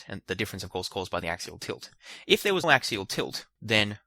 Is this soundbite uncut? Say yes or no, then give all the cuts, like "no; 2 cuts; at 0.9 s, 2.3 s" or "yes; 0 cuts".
no; 1 cut; at 2.6 s